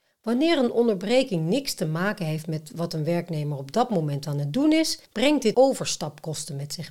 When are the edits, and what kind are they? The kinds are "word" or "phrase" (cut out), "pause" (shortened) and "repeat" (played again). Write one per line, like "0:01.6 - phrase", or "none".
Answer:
0:05.1 - pause
0:05.5 - word